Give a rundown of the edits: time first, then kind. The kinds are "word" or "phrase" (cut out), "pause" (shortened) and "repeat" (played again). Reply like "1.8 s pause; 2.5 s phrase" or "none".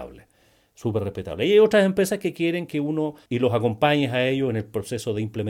3.3 s word